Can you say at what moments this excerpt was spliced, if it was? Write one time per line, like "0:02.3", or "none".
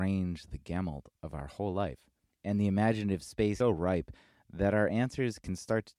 0:01.2
0:02.2
0:03.6